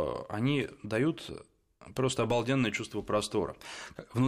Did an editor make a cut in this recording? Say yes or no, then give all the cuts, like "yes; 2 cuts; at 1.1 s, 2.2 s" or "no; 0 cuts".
no; 0 cuts